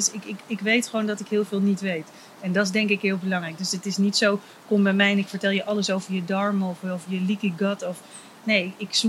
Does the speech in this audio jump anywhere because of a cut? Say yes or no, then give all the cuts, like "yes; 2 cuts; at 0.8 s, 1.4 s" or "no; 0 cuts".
no; 0 cuts